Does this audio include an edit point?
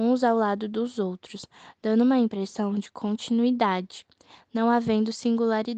no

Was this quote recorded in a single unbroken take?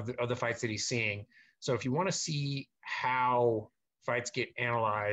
yes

